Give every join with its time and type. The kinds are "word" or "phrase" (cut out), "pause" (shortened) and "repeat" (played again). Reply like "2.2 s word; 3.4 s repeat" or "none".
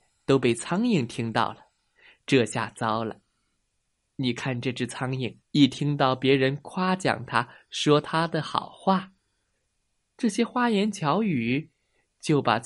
5.4 s pause